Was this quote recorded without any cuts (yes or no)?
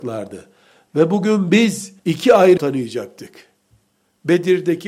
no